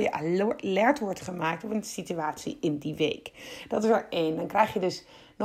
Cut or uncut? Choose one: uncut